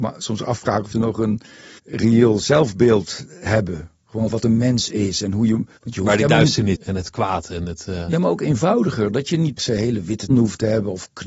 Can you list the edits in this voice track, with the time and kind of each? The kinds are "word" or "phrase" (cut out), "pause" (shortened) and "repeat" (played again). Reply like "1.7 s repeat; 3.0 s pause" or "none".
0.9 s word; 1.8 s pause; 4.3 s word; 5.8 s pause; 6.8 s word; 9.6 s word; 10.3 s word